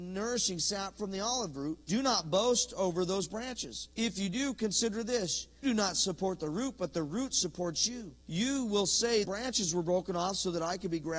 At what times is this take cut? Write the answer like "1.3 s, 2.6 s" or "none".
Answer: 1.8 s, 3.9 s, 5.6 s, 8.2 s, 9.2 s

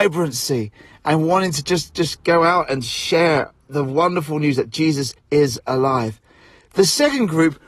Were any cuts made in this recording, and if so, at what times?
5.2 s

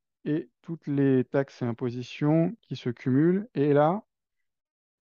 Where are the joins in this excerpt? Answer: none

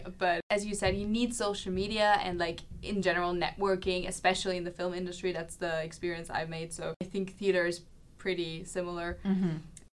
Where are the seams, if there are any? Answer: none

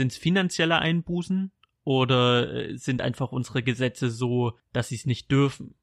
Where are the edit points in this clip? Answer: none

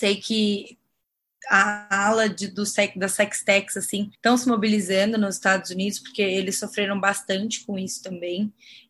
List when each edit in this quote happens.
4.1 s

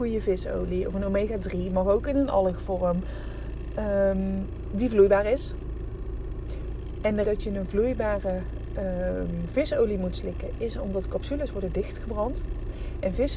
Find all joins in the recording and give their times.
7.2 s

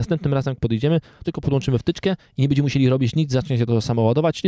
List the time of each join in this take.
1.2 s

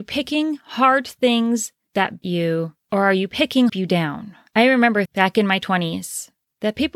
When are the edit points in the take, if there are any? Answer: 2.2 s, 3.7 s, 5.0 s

